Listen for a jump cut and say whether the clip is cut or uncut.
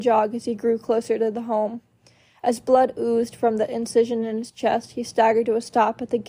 uncut